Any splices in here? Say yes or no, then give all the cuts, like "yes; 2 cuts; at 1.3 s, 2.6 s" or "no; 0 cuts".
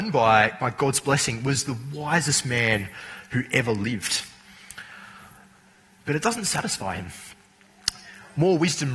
no; 0 cuts